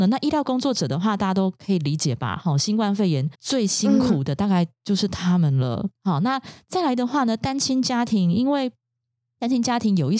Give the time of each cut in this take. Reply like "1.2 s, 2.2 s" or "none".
3.3 s, 5.9 s